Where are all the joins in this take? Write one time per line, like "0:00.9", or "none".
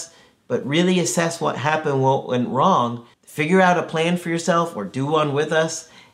0:03.1